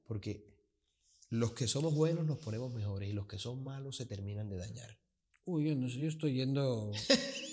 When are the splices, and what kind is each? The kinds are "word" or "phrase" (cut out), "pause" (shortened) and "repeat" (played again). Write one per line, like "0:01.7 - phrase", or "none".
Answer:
none